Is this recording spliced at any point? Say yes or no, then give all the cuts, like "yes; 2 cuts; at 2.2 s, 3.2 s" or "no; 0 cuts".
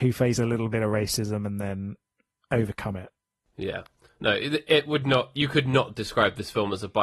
no; 0 cuts